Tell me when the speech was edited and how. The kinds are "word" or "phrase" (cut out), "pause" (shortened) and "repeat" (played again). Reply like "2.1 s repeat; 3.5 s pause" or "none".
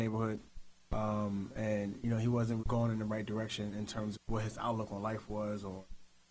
2.6 s word; 4.1 s word